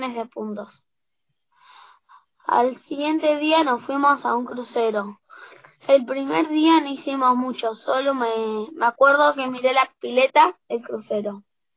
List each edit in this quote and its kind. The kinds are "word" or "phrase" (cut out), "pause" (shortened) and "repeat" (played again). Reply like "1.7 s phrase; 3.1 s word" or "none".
none